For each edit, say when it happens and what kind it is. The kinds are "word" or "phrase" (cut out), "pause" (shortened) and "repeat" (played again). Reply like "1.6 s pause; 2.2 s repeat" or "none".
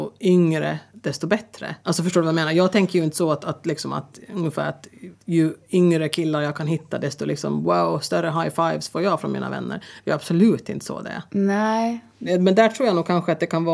1.8 s pause; 5.2 s pause; 11.3 s pause; 12.3 s word